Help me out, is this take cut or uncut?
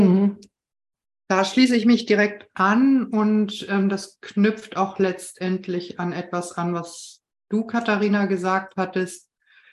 uncut